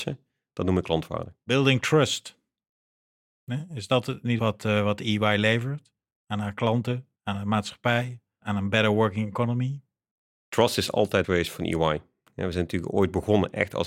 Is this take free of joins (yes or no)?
no